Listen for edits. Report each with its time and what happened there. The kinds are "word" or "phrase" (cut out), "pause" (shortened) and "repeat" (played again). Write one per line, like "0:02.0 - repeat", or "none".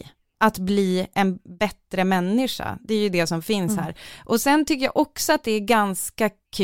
none